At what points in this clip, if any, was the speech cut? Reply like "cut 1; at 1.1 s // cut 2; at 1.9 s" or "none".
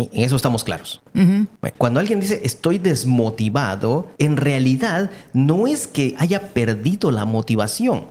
cut 1; at 1.7 s // cut 2; at 4.2 s